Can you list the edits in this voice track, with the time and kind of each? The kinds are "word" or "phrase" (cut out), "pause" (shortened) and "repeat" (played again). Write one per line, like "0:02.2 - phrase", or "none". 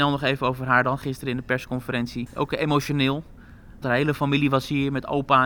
none

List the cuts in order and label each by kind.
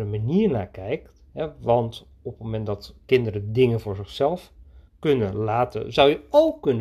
0:01.3 - pause
0:04.9 - pause

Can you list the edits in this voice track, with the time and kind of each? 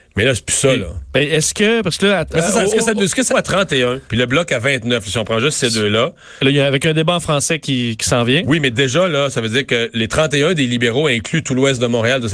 0:03.3 - phrase
0:04.1 - pause

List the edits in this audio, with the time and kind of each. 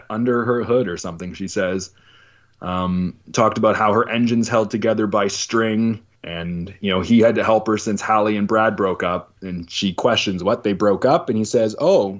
0:03.2 - pause
0:06.2 - pause
0:09.4 - pause

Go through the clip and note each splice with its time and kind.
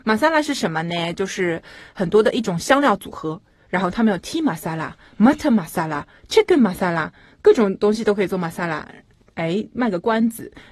none

